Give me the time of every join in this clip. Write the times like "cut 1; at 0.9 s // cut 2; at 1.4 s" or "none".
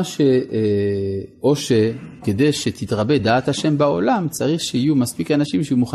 none